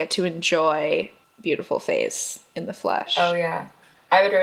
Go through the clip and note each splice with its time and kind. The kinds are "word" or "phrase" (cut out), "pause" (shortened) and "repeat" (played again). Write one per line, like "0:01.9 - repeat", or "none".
0:01.2 - word